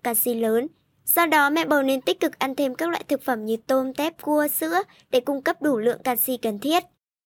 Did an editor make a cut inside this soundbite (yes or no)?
no